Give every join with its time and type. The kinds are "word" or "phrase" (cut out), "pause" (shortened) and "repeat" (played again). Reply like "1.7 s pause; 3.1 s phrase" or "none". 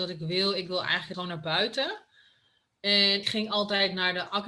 1.1 s word; 3.2 s word